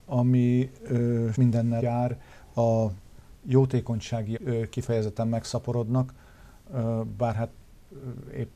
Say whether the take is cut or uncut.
cut